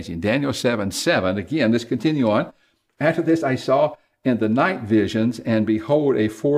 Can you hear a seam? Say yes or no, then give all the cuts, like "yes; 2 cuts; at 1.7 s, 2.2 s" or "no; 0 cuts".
no; 0 cuts